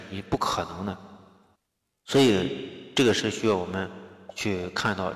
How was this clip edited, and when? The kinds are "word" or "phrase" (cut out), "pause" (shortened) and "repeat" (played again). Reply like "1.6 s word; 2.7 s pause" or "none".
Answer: 1.6 s pause